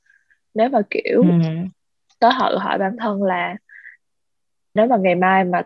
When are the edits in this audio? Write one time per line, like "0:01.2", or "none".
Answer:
0:04.8